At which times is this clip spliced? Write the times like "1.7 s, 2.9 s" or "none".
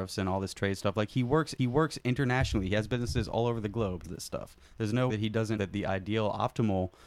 1.6 s, 4.0 s, 4.6 s, 5.1 s, 5.6 s